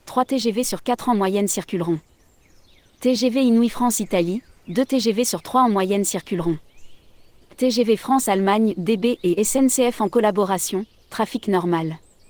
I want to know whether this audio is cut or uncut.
uncut